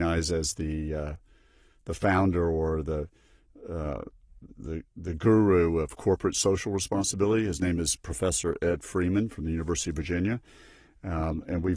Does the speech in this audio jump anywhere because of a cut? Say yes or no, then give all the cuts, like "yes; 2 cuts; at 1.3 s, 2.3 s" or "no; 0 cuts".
no; 0 cuts